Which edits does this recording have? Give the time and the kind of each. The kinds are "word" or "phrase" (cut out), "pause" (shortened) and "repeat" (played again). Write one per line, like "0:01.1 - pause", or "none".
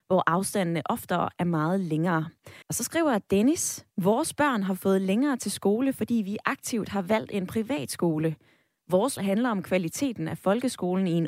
0:02.6 - pause
0:03.9 - pause
0:09.2 - word